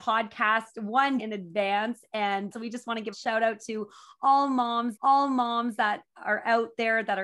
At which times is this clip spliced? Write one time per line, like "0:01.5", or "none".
0:01.2
0:02.5
0:03.1
0:05.0